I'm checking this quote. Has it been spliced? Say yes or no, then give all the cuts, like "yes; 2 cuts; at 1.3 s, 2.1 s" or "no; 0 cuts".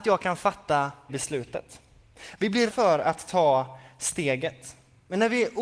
yes; 2 cuts; at 1.1 s, 2.7 s